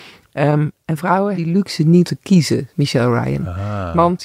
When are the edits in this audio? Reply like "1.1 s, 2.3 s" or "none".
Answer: 1.3 s, 2.0 s, 2.7 s